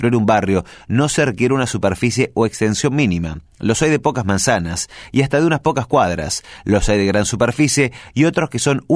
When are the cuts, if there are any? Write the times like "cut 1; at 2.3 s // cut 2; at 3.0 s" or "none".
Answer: none